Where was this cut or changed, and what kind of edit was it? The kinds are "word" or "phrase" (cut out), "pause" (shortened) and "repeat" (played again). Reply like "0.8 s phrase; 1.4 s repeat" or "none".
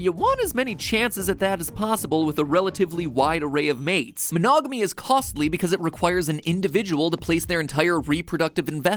none

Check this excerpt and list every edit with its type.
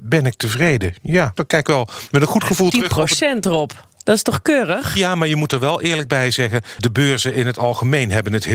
1.4 s word; 6.8 s word

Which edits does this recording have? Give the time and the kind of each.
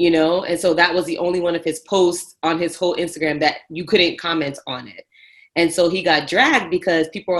none

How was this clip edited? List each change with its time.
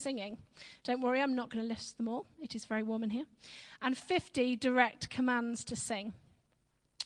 none

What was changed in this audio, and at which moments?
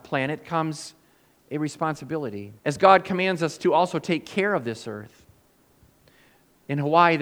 2.6 s pause

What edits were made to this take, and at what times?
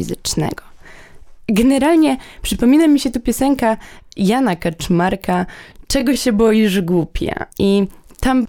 7.5 s pause

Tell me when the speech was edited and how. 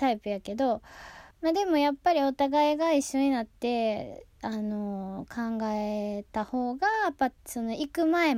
1.3 s pause; 7.4 s pause

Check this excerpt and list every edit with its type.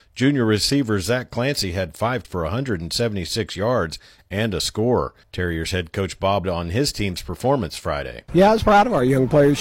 2.2 s word; 5.2 s pause; 6.4 s word

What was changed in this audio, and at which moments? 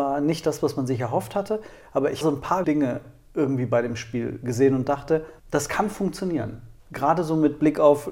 2.2 s word; 2.6 s word; 5.4 s pause; 6.8 s pause

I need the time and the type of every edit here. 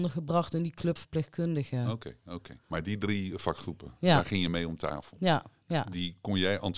1.0 s word; 2.6 s pause

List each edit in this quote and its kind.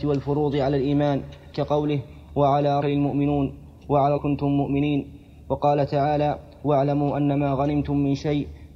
1.5 s word; 2.8 s phrase; 4.2 s phrase

